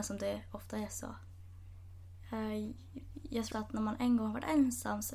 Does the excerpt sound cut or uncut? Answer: cut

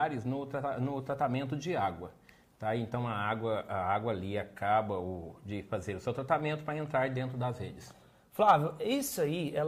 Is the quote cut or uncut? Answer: uncut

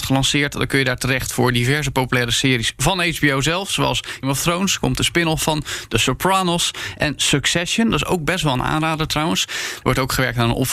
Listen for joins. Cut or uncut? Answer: cut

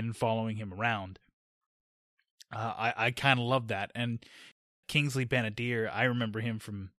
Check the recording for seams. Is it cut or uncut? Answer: cut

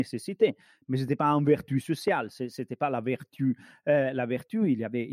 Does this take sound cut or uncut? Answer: uncut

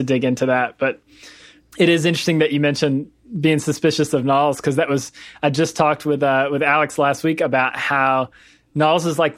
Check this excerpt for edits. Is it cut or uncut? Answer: uncut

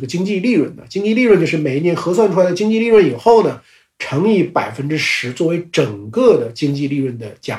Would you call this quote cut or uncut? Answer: uncut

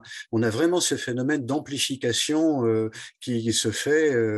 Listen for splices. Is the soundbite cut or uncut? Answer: uncut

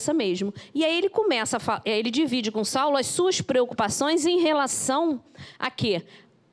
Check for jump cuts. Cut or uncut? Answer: uncut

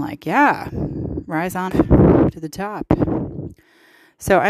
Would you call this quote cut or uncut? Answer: cut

